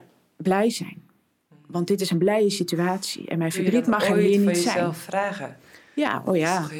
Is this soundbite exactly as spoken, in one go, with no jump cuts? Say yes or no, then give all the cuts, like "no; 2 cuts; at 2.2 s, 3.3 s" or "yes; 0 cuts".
yes; 0 cuts